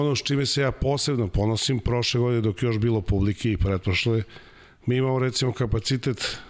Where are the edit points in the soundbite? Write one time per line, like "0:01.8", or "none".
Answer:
none